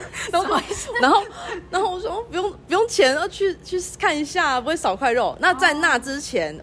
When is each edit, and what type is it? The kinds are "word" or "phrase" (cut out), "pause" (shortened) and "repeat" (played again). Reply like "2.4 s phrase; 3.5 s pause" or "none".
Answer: none

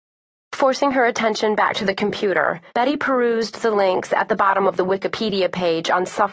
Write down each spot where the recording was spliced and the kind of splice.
2.7 s pause

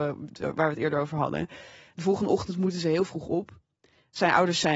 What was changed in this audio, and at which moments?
none

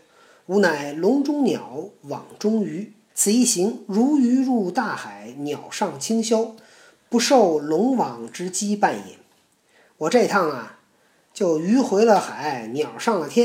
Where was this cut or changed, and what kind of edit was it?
3.1 s pause

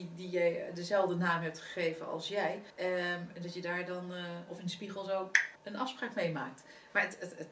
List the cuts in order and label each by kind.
2.7 s pause; 5.5 s pause

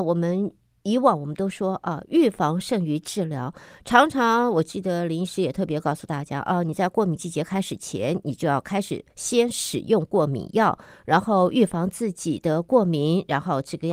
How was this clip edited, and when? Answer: 9.1 s pause

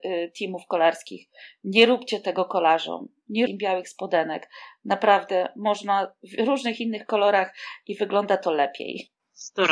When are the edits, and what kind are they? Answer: 3.5 s word

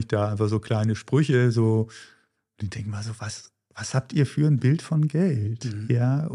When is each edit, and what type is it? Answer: none

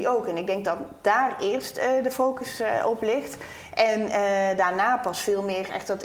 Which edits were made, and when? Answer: none

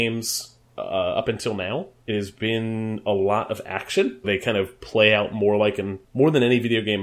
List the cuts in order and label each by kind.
2.0 s pause; 4.2 s word; 6.0 s pause

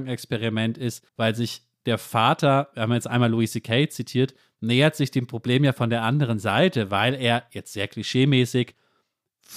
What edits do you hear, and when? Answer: 1.1 s pause

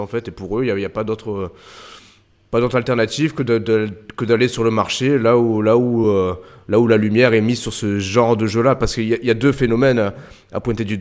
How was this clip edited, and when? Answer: none

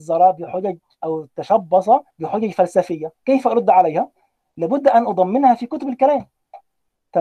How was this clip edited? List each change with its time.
2.1 s pause; 3.1 s pause

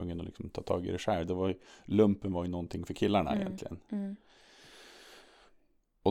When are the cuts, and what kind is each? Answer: none

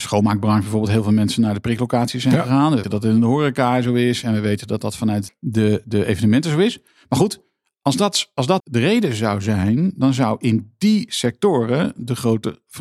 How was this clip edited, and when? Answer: 2.8 s word; 5.3 s word; 8.6 s word

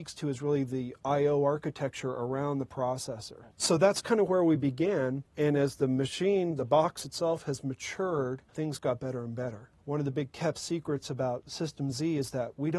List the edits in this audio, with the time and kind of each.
3.5 s pause; 8.5 s pause

